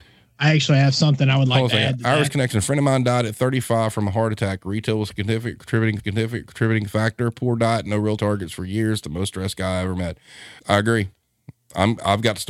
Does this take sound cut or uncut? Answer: cut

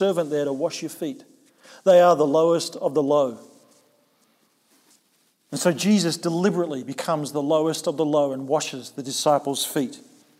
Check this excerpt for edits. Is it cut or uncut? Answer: uncut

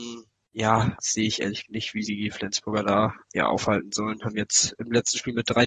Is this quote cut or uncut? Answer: cut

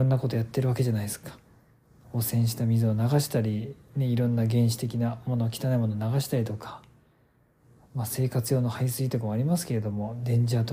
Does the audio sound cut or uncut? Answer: uncut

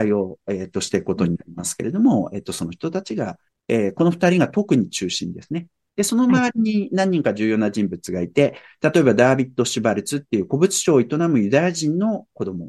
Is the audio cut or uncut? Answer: cut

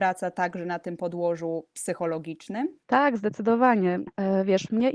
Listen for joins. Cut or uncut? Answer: uncut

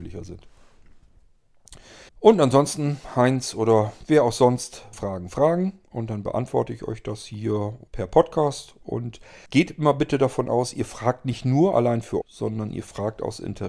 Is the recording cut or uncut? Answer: cut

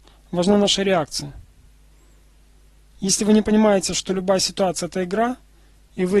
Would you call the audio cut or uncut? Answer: uncut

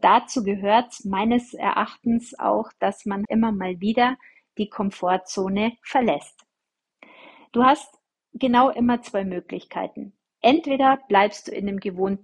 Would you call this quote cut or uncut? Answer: cut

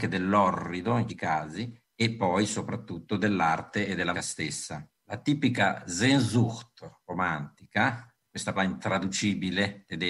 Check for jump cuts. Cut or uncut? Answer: cut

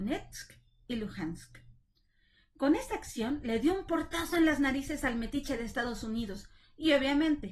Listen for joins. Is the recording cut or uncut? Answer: uncut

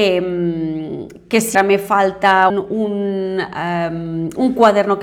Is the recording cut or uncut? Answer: cut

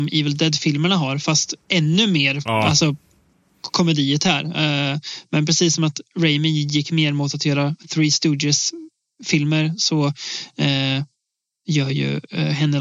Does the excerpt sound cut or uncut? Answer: cut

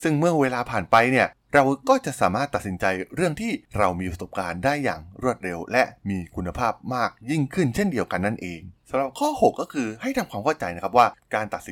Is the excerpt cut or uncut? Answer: uncut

